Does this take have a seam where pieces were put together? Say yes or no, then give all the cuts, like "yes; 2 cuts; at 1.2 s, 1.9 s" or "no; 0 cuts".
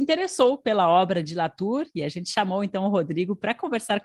no; 0 cuts